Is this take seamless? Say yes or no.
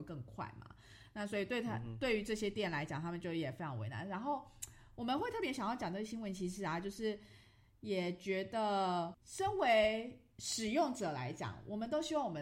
yes